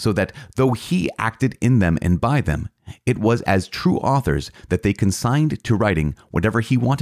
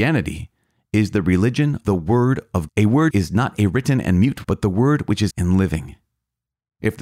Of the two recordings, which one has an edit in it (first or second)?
second